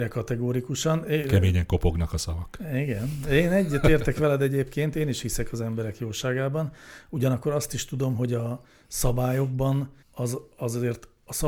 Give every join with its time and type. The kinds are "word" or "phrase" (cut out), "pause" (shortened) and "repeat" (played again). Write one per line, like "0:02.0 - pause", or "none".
0:10.0 - pause